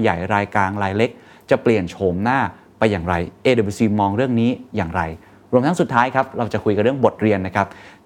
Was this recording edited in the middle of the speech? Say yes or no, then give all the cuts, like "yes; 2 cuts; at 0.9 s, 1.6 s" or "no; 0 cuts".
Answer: no; 0 cuts